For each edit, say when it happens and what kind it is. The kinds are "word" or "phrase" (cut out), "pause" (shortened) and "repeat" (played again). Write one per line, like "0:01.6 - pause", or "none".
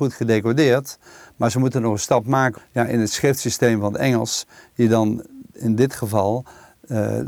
0:02.6 - word